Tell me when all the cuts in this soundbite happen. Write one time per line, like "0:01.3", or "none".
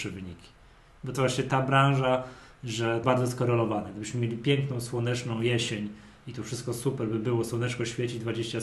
0:01.1
0:03.0